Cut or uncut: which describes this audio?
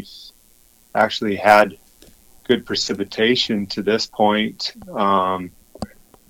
uncut